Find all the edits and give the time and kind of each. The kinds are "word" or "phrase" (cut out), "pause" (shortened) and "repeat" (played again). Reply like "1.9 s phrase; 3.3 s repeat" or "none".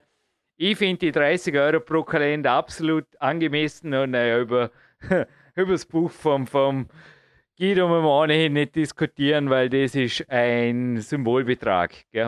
none